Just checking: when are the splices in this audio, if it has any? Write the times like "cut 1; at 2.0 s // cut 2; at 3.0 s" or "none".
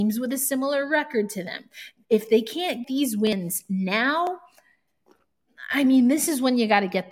cut 1; at 2.8 s